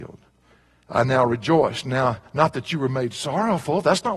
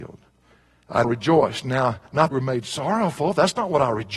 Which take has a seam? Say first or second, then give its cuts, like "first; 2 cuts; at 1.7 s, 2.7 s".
second; 2 cuts; at 1.0 s, 2.3 s